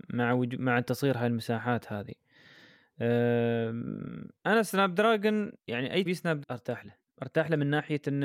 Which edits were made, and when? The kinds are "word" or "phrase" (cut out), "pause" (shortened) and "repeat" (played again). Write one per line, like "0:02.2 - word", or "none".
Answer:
0:04.4 - pause
0:05.6 - pause
0:06.1 - word
0:06.4 - phrase